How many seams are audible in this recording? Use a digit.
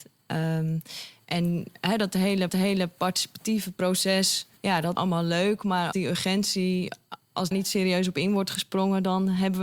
6